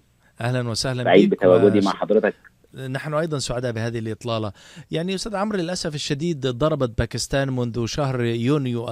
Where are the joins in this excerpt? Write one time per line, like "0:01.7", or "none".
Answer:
none